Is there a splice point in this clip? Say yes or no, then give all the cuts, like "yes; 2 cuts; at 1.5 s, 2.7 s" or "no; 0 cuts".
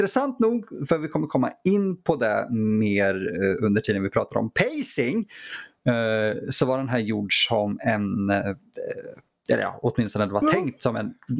no; 0 cuts